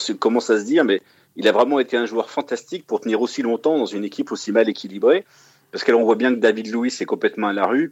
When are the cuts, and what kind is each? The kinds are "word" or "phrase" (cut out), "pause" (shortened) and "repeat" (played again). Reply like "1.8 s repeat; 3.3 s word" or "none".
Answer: none